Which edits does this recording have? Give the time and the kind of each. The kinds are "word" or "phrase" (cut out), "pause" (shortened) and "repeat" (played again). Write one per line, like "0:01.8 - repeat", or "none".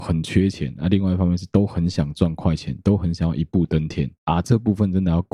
0:04.2 - pause